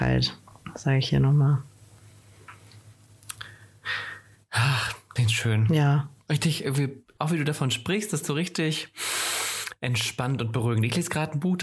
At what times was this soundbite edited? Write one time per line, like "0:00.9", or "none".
0:05.2
0:07.2
0:08.2